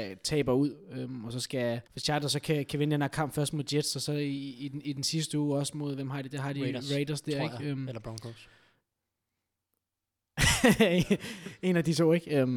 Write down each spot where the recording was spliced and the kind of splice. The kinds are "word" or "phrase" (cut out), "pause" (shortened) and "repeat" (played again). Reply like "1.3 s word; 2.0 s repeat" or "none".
1.9 s pause

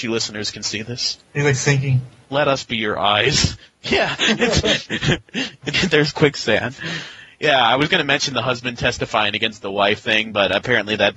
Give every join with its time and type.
1.2 s pause; 5.7 s word

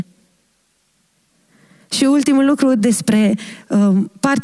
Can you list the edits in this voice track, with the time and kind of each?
none

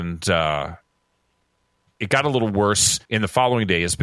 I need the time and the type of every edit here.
3.1 s pause

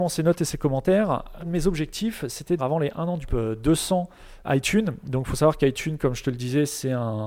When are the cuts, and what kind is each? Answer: 1.4 s phrase; 2.6 s word; 3.3 s phrase; 4.4 s word

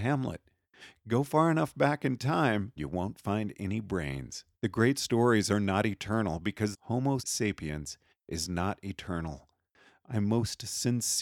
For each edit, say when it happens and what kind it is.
2.8 s word; 4.5 s pause; 6.7 s phrase; 7.2 s word

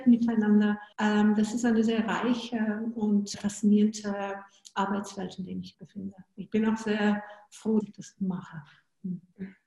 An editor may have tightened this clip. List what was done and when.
0.9 s pause; 3.3 s word; 5.7 s word; 7.8 s word

